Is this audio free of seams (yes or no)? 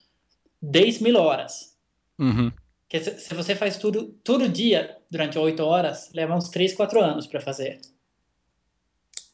yes